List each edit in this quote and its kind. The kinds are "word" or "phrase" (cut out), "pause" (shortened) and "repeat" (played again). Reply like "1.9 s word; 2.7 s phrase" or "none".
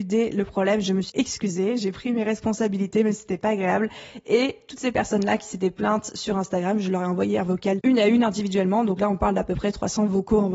1.1 s word; 7.8 s word